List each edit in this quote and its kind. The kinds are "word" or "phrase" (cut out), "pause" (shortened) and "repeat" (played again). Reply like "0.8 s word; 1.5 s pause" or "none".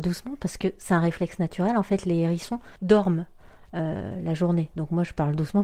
2.8 s pause